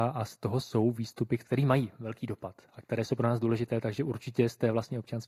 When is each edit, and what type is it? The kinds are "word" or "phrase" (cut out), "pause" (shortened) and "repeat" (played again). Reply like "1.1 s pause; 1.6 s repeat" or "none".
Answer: none